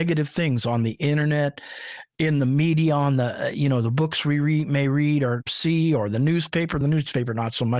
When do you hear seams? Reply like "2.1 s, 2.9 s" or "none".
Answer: none